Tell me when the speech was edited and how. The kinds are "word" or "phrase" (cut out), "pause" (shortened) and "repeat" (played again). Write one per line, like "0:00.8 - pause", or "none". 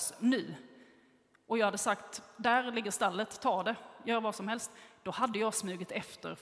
none